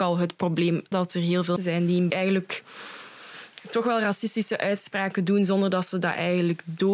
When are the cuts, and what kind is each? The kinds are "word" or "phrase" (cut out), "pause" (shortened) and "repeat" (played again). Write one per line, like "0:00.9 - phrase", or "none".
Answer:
0:00.9 - word
0:01.6 - word
0:02.1 - phrase